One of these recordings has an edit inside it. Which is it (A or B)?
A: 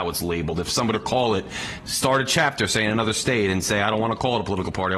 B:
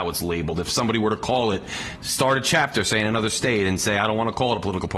A